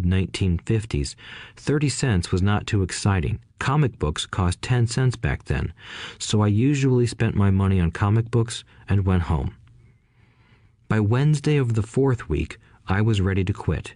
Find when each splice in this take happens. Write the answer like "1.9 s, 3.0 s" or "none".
3.5 s